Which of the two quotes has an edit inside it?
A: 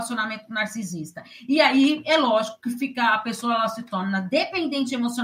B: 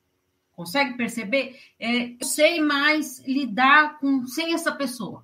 B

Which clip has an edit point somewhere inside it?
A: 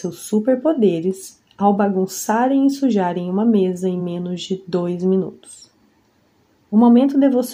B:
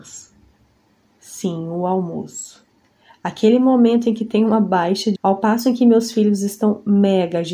B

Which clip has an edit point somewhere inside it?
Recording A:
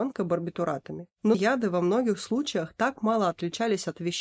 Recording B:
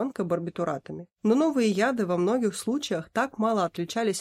A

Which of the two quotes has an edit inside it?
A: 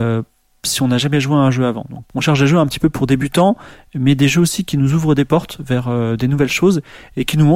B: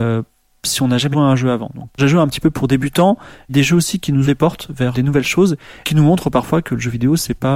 B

